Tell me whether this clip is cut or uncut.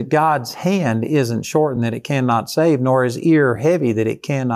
uncut